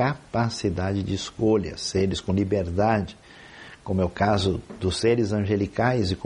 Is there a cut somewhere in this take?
no; 0 cuts

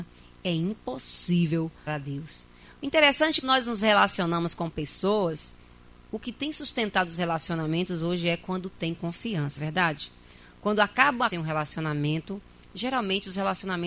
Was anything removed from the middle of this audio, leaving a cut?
yes; 4 cuts; at 1.9 s, 3.4 s, 9.6 s, 11.3 s

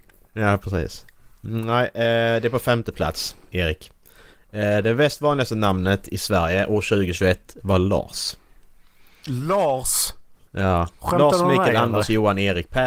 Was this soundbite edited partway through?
no; 0 cuts

